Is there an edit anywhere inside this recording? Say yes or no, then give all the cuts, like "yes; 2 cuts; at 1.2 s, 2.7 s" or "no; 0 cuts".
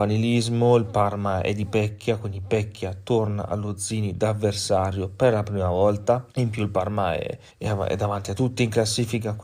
yes; 2 cuts; at 6.3 s, 7.5 s